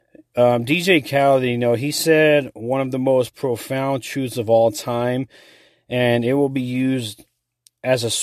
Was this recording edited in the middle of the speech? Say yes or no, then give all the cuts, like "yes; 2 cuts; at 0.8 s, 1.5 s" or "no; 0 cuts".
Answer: no; 0 cuts